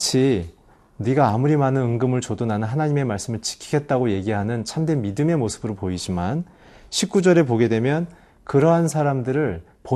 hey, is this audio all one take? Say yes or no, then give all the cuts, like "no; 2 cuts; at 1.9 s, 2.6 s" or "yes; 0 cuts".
yes; 0 cuts